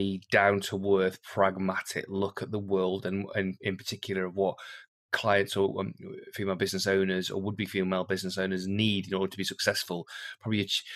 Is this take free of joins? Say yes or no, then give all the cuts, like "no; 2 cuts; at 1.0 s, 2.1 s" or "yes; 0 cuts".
yes; 0 cuts